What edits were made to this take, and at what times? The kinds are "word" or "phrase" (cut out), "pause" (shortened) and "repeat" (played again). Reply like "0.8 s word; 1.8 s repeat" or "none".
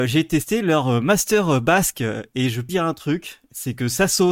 2.7 s word